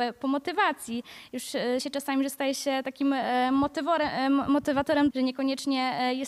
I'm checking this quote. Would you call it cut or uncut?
cut